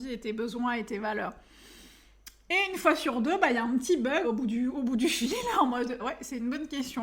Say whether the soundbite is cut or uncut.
cut